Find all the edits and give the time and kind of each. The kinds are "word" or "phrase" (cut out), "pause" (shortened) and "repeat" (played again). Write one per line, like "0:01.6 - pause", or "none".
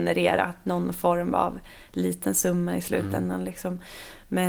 none